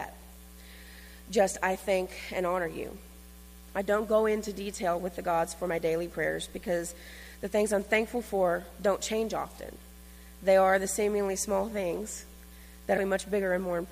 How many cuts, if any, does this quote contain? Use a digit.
1